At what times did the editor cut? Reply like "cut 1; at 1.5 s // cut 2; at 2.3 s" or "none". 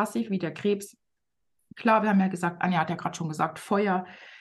none